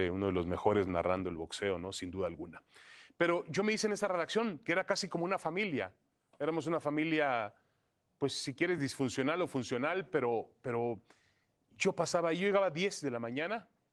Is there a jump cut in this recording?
no; 0 cuts

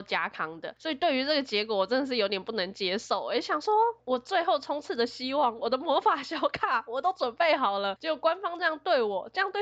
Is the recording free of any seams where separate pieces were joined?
no; 1 cut; at 5.6 s

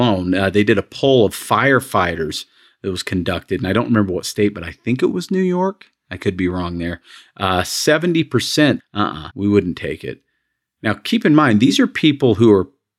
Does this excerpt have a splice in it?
yes; 2 cuts; at 8.8 s, 9.3 s

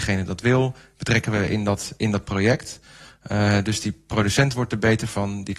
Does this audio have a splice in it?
no; 0 cuts

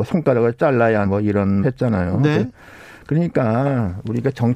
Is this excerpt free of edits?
no; 2 cuts; at 1.0 s, 1.6 s

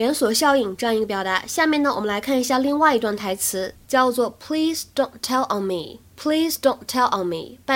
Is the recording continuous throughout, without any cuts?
no; 1 cut; at 6.1 s

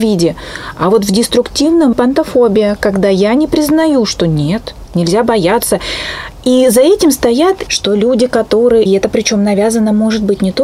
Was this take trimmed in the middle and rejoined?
yes; 4 cuts; at 1.9 s, 4.9 s, 7.7 s, 8.9 s

